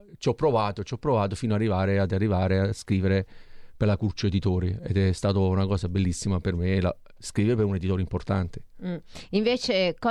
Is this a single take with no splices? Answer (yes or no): yes